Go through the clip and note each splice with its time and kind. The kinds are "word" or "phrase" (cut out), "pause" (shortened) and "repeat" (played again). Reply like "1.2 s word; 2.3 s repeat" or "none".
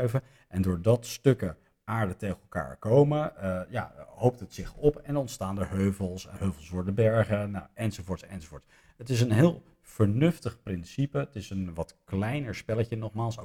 none